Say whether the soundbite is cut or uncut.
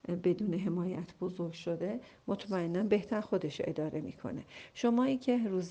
uncut